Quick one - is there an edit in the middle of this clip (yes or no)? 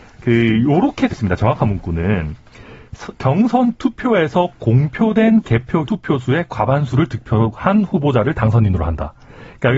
yes